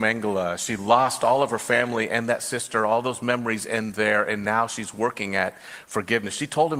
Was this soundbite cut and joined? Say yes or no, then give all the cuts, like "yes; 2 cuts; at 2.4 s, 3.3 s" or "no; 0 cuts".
no; 0 cuts